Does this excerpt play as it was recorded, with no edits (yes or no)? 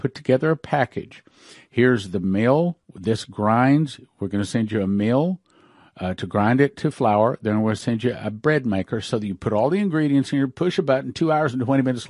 no